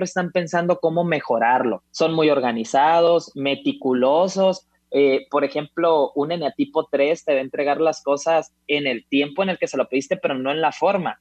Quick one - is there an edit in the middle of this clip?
yes; 2 cuts; at 1.9 s, 8.6 s

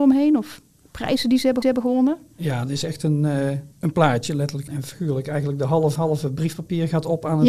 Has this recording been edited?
yes; 4 cuts; at 1.6 s, 3.7 s, 4.7 s, 6.0 s

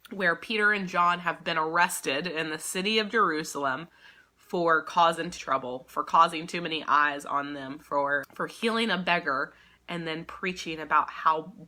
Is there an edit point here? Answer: yes; 2 cuts; at 5.4 s, 8.2 s

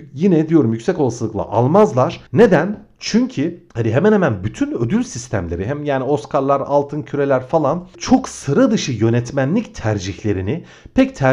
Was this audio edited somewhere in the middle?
yes; 3 cuts; at 2.3 s, 3.7 s, 8.0 s

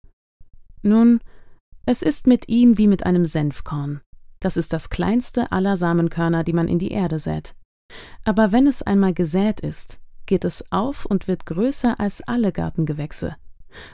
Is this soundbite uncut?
yes; 0 cuts

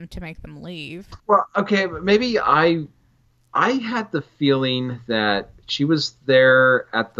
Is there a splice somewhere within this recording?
yes; 1 cut; at 1.2 s

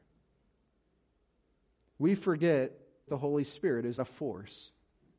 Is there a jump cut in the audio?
yes; 2 cuts; at 3.1 s, 4.0 s

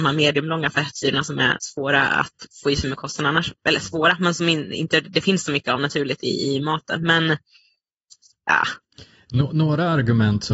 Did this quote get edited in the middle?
no; 0 cuts

